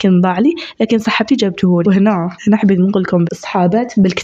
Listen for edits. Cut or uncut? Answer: cut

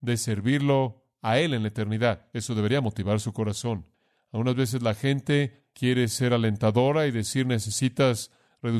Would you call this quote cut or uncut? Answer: uncut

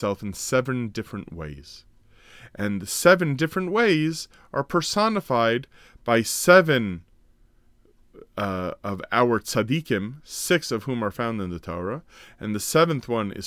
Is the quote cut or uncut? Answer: uncut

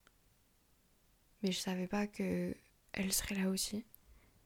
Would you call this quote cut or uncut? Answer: uncut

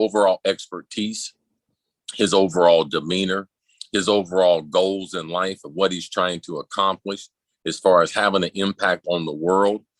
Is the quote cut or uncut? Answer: uncut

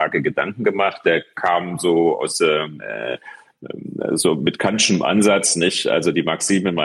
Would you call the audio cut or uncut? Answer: uncut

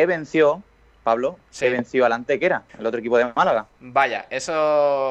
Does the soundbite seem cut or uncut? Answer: cut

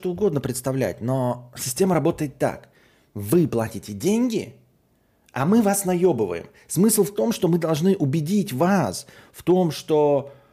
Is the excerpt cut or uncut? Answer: uncut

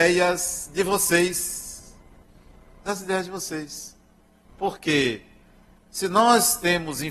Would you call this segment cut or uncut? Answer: uncut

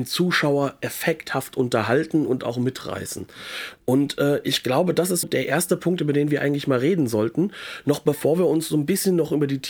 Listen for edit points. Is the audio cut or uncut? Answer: cut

